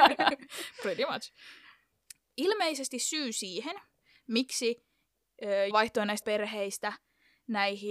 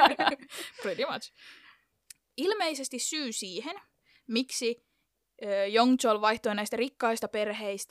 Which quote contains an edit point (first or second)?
first